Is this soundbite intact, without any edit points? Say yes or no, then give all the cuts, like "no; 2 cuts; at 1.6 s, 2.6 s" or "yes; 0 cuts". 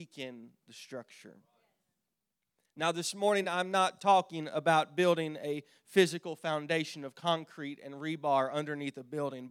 yes; 0 cuts